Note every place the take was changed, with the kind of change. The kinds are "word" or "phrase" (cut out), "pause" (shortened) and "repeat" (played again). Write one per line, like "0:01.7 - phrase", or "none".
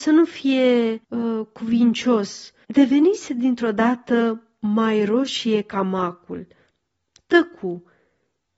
0:01.0 - pause
0:02.6 - pause